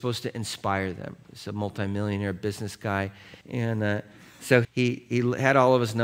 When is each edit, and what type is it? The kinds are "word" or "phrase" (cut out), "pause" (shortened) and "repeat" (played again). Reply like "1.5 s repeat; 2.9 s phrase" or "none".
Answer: 3.4 s pause; 4.6 s word